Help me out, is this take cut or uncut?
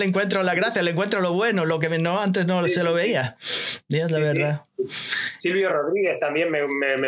uncut